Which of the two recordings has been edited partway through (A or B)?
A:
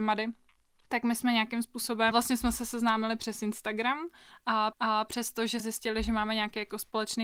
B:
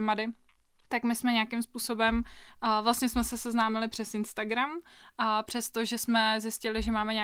A